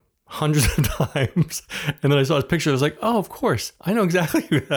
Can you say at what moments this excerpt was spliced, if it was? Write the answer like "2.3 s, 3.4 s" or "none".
none